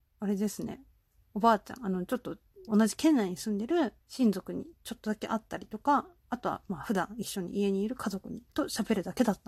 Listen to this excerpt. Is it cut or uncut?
cut